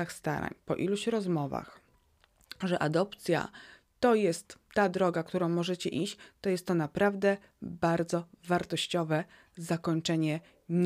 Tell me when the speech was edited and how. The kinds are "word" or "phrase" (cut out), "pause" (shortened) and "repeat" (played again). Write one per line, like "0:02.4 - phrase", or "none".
none